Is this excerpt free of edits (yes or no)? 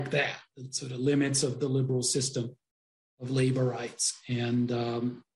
yes